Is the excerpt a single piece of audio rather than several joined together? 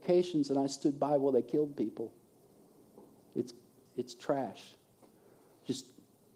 no; 1 cut; at 3.9 s

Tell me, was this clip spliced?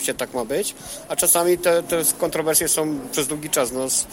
no; 0 cuts

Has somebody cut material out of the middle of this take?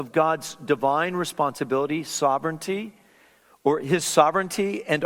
no; 0 cuts

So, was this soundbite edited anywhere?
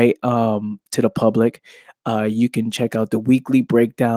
no; 0 cuts

